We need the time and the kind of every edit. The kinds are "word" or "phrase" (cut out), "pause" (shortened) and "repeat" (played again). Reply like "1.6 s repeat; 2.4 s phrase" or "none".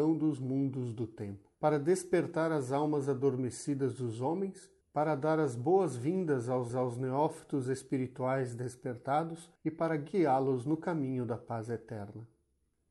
1.5 s pause; 4.8 s pause; 6.7 s repeat; 9.6 s pause